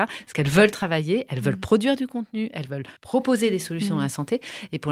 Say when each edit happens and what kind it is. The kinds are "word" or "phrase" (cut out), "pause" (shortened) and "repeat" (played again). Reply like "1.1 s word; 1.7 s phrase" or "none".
3.0 s pause

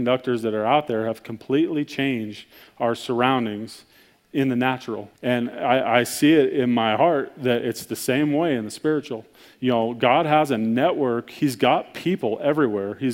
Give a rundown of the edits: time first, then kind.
5.2 s pause

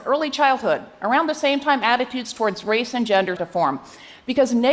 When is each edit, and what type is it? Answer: 3.4 s word

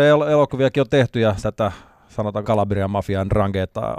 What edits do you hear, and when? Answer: 1.4 s word; 2.4 s word

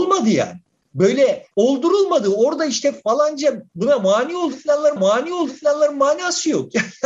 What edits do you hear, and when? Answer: 1.5 s pause; 3.7 s pause; 5.0 s repeat

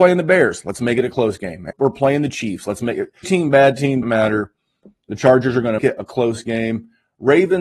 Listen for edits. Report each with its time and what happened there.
1.7 s word; 3.2 s word; 4.0 s word; 5.8 s word

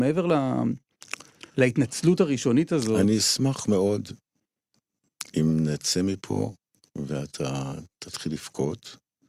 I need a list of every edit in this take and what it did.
6.7 s pause

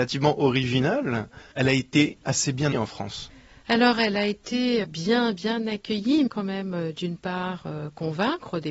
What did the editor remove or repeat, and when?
1.5 s pause; 2.7 s word; 3.6 s pause; 4.8 s word; 6.3 s phrase

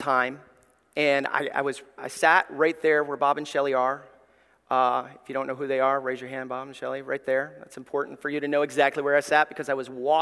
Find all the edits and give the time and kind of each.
2.0 s word

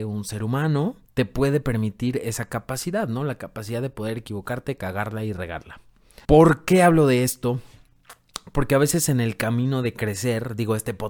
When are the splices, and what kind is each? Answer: 1.1 s pause; 6.2 s pause

